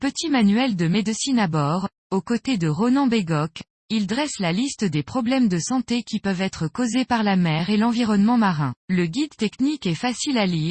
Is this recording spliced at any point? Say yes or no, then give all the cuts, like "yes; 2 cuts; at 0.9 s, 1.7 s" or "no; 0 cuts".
yes; 1 cut; at 8.8 s